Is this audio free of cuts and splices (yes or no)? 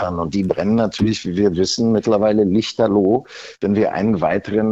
yes